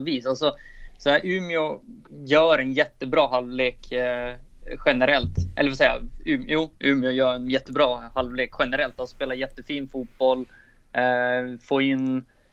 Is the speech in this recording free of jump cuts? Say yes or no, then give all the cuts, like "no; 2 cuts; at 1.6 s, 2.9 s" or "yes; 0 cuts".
yes; 0 cuts